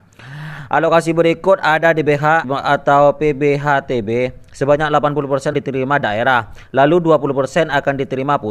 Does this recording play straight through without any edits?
no; 2 cuts; at 2.4 s, 5.5 s

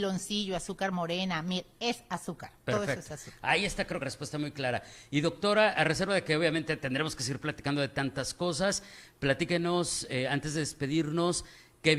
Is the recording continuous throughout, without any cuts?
no; 2 cuts; at 2.6 s, 4.0 s

